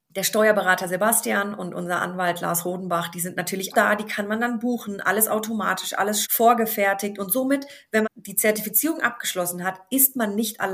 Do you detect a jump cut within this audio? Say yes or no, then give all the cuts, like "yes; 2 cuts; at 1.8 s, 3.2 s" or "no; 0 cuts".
yes; 3 cuts; at 3.7 s, 6.2 s, 8.0 s